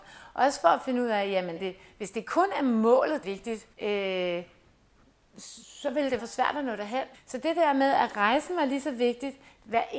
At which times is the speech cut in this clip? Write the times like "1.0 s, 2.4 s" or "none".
1.6 s, 3.2 s, 3.7 s, 6.2 s, 7.1 s